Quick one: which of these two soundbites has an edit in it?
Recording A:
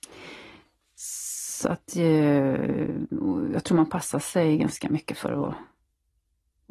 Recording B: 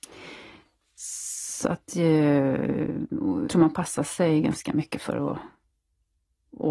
B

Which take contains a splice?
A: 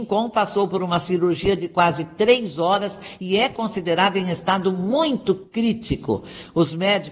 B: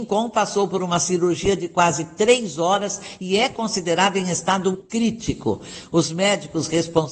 B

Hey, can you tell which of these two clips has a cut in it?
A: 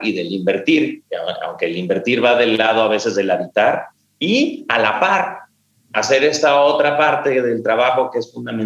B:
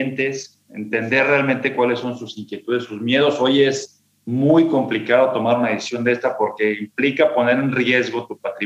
B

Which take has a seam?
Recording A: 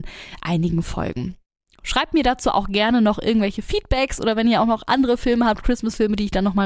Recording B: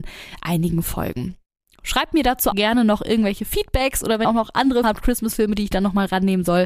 B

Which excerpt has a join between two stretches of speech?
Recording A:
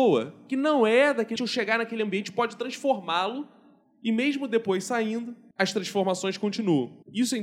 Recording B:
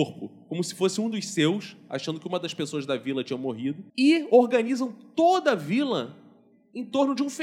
A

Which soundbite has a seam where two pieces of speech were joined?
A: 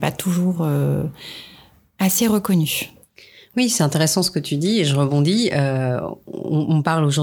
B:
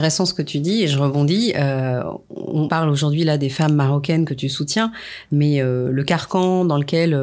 B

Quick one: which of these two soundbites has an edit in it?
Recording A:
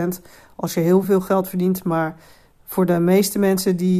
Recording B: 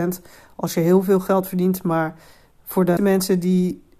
B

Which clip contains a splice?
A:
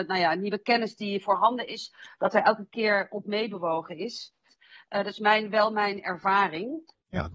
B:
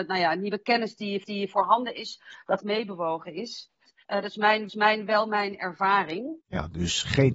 B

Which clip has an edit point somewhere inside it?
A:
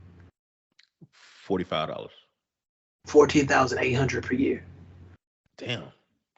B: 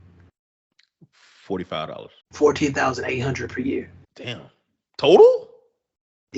B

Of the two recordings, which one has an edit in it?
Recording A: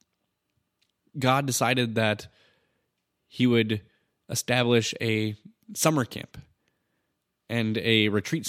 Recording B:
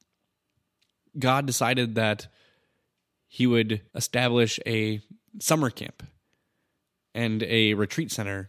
B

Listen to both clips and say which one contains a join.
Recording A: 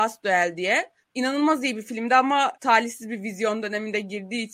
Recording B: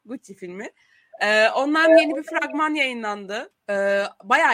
A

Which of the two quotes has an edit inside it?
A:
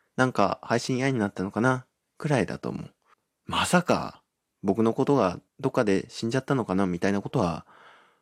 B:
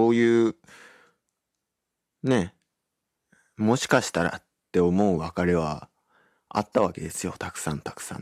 A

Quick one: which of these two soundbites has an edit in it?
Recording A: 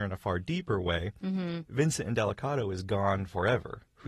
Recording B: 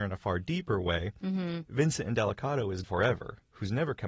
B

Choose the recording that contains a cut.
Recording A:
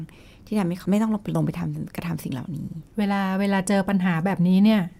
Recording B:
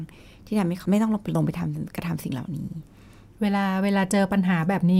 A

